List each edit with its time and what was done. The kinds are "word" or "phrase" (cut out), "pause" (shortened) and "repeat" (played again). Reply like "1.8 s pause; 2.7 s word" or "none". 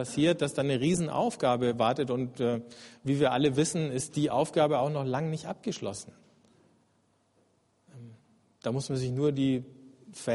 none